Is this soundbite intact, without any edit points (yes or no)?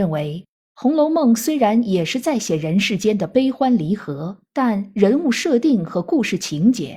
no